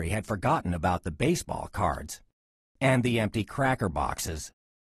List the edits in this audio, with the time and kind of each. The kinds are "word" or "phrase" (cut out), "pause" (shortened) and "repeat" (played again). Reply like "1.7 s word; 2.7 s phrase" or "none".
none